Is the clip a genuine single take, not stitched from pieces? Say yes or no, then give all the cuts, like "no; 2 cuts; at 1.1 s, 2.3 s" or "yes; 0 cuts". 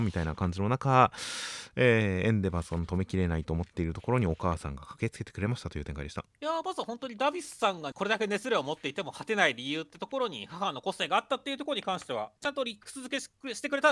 no; 3 cuts; at 6.3 s, 7.9 s, 12.4 s